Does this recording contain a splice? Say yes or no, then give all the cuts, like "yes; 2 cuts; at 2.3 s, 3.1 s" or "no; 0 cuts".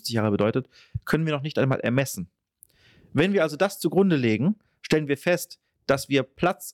no; 0 cuts